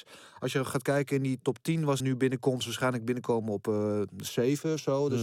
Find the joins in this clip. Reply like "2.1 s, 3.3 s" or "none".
1.4 s, 2.0 s, 2.6 s